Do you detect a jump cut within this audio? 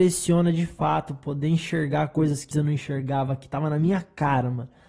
yes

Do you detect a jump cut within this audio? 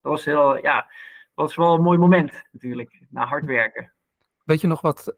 no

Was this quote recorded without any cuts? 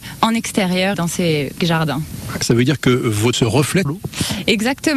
no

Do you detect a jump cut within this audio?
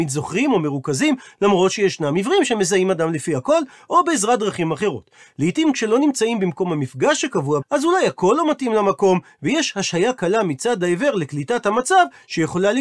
yes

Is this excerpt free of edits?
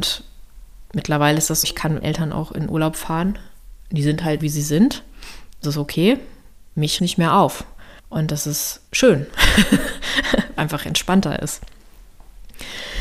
no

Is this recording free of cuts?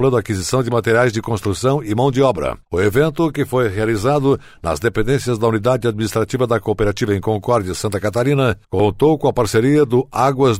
no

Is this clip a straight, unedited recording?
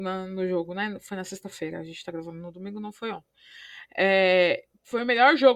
yes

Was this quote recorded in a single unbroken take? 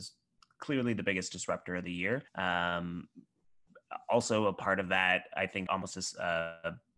no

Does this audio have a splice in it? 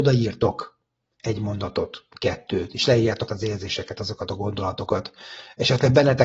yes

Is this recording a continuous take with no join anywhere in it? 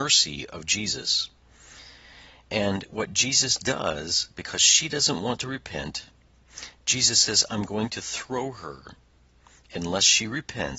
yes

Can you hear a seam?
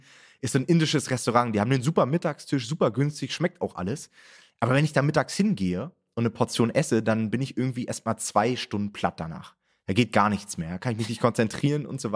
no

